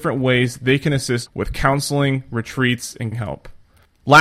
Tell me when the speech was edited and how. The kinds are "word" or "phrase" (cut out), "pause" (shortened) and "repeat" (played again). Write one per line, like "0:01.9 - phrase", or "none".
0:01.3 - word
0:03.1 - word